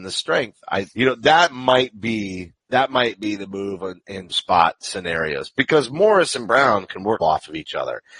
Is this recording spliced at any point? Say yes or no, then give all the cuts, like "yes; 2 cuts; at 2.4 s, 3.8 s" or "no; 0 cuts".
yes; 4 cuts; at 0.9 s, 2.6 s, 4.3 s, 7.2 s